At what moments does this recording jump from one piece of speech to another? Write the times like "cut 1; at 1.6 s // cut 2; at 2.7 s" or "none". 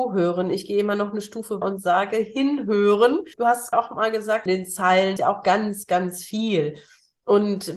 cut 1; at 1.6 s // cut 2; at 3.3 s // cut 3; at 3.7 s // cut 4; at 4.5 s // cut 5; at 5.2 s